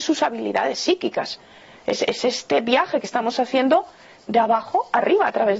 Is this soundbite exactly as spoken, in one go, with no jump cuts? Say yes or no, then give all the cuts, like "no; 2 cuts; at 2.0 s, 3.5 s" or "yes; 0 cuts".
yes; 0 cuts